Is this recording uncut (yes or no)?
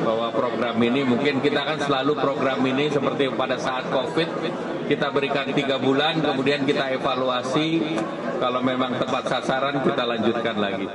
yes